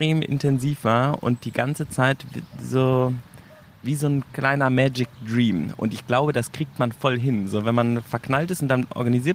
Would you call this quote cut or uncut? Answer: uncut